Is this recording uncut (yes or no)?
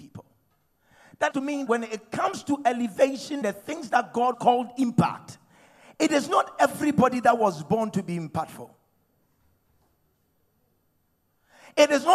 no